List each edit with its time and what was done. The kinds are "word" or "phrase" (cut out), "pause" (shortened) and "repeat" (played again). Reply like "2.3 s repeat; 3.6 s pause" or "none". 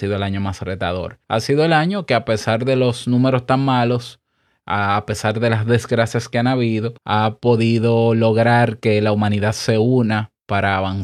1.2 s pause; 7.0 s pause